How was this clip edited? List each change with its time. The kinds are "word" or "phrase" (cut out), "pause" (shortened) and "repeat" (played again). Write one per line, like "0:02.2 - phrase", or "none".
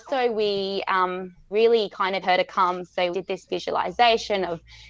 0:01.5 - word
0:02.2 - phrase
0:03.1 - word
0:03.5 - word